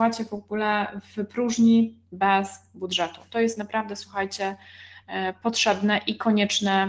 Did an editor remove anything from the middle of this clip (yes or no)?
no